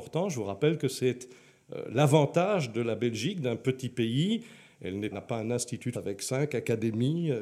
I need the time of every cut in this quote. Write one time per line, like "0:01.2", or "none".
0:05.1
0:05.9